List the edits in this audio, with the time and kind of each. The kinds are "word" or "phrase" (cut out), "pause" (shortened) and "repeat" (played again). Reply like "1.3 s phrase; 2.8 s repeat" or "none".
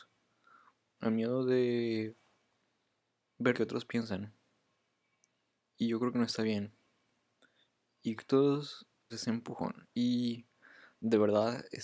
1.0 s word; 3.5 s word; 8.2 s word; 9.1 s word